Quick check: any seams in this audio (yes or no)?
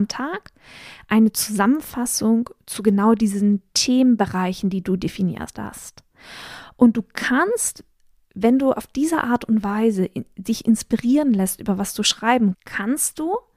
yes